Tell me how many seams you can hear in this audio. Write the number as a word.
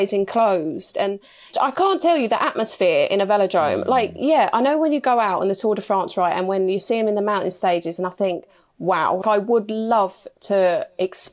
two